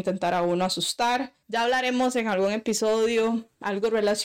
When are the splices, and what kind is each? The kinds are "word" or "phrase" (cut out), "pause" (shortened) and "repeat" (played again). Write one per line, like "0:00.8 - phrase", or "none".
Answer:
0:01.4 - pause